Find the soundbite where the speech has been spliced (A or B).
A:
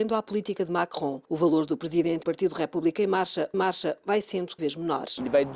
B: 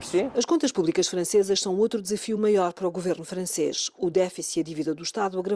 A